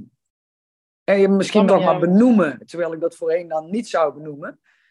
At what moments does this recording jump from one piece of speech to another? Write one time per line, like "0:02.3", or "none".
0:01.7